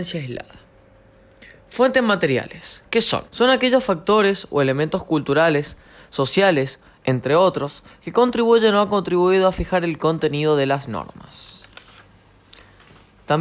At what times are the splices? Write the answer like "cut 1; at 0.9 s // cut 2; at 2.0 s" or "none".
cut 1; at 3.3 s // cut 2; at 7.0 s